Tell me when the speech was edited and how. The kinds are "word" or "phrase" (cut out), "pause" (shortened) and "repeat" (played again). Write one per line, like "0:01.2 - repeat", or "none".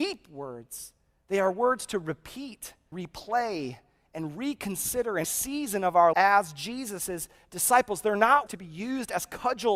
0:02.9 - word
0:05.2 - word
0:06.1 - word
0:08.5 - word